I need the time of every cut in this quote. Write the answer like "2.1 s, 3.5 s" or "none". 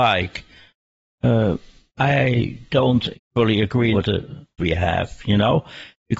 3.1 s, 3.9 s, 4.6 s